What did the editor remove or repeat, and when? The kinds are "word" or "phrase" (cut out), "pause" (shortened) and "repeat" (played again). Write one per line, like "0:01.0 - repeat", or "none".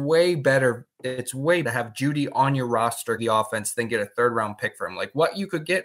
0:01.6 - word
0:03.2 - word